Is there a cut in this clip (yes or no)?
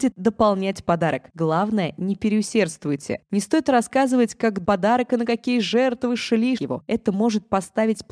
yes